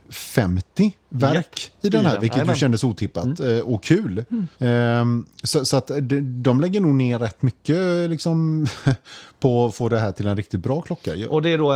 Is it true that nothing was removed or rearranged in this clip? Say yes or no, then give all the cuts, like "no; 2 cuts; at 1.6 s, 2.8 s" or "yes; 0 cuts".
no; 1 cut; at 4.5 s